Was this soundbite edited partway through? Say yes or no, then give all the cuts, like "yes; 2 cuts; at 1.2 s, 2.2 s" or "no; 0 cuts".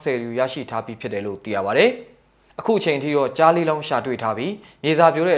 no; 0 cuts